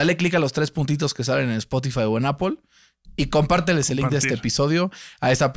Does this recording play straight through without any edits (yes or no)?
yes